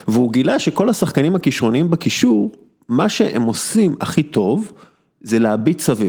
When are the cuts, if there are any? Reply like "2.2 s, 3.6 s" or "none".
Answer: none